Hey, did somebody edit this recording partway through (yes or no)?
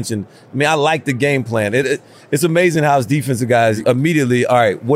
no